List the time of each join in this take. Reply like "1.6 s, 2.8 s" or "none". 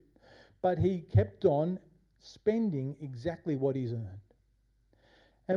none